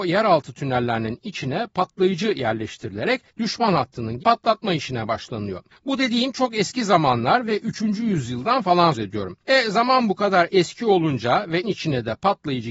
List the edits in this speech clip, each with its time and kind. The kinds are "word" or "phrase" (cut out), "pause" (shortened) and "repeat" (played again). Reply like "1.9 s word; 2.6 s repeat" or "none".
3.3 s pause; 4.2 s word; 5.7 s pause; 8.9 s word; 9.4 s pause; 11.6 s word